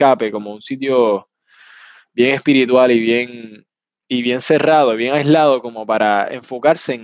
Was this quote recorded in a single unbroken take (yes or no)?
yes